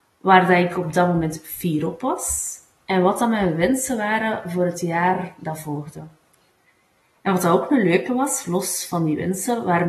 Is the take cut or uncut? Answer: uncut